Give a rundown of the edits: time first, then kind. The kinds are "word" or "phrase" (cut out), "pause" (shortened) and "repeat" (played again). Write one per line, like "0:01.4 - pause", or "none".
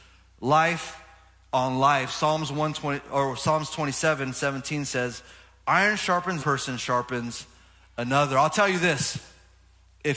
0:06.4 - phrase